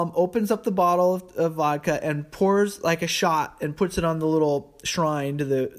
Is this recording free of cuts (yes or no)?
yes